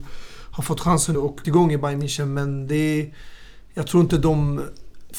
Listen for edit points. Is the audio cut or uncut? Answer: cut